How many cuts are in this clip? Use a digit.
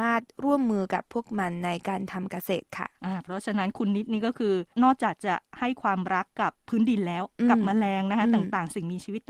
1